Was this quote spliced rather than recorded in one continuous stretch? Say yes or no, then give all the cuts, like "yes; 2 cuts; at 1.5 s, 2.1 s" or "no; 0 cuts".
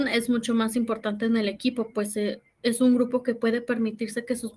no; 0 cuts